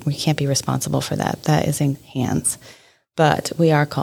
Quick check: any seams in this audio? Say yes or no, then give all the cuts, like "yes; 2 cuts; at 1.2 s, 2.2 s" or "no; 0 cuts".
yes; 1 cut; at 1.9 s